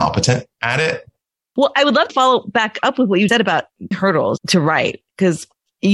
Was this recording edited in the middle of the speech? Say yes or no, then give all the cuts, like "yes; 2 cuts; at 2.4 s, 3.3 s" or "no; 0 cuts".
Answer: yes; 4 cuts; at 2.1 s, 3.3 s, 3.9 s, 4.4 s